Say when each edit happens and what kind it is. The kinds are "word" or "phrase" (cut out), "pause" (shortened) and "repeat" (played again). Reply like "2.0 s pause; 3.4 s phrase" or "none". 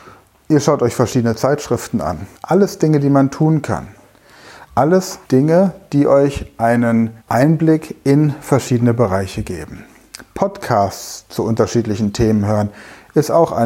2.3 s pause; 5.2 s pause; 7.2 s pause